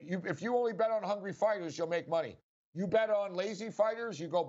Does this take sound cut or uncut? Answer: uncut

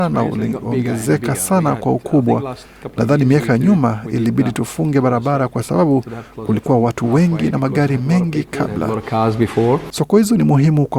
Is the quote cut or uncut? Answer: uncut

